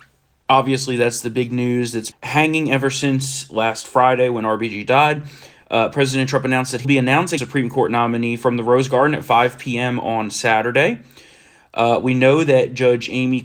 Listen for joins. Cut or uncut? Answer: cut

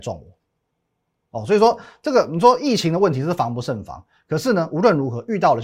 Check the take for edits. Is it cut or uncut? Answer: uncut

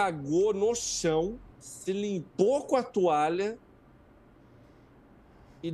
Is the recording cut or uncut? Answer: cut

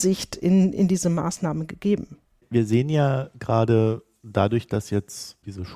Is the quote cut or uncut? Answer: uncut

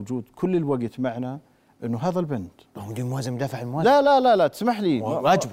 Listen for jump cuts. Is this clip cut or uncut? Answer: uncut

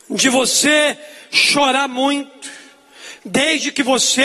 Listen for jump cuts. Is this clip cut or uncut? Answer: uncut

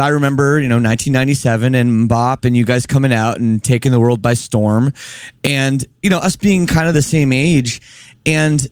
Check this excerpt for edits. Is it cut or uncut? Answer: uncut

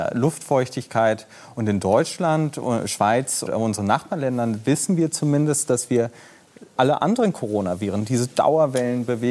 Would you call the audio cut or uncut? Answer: cut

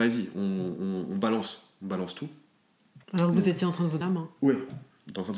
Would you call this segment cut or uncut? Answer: cut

